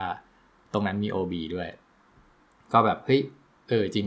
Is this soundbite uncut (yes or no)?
yes